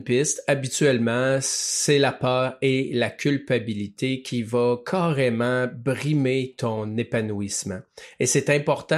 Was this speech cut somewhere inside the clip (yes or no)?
no